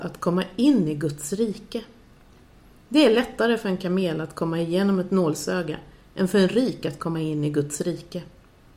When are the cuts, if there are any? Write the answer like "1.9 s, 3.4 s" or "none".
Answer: none